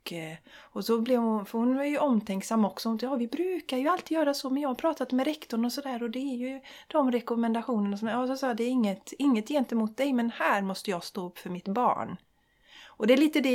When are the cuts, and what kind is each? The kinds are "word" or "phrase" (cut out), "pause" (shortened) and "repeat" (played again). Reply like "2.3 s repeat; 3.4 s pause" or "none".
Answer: none